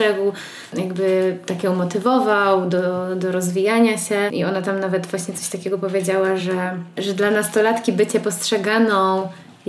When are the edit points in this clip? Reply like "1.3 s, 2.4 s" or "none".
none